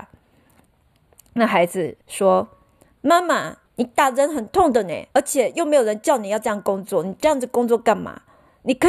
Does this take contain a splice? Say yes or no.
yes